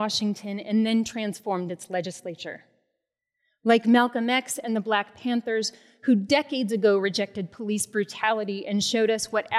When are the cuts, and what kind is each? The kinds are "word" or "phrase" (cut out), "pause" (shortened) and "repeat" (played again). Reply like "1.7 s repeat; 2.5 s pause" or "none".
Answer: none